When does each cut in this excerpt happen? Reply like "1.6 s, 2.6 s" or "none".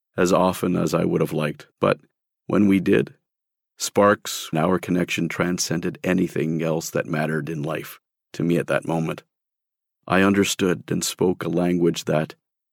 1.7 s, 4.5 s